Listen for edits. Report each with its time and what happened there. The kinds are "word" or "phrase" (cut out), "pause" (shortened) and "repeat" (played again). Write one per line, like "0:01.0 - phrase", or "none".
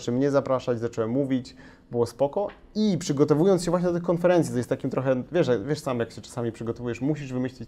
none